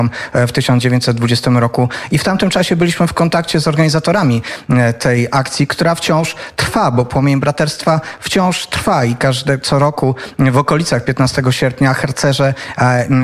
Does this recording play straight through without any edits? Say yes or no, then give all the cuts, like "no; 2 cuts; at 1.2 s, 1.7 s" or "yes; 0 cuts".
yes; 0 cuts